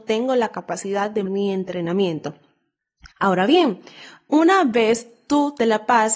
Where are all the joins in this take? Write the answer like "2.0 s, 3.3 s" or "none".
1.3 s, 3.1 s